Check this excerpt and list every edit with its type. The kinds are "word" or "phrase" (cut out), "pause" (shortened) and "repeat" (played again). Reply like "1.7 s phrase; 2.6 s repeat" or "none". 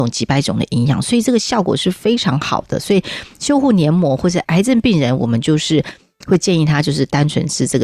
none